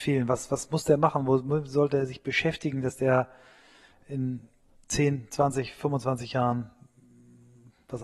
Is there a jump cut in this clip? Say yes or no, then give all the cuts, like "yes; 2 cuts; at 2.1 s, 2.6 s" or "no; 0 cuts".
no; 0 cuts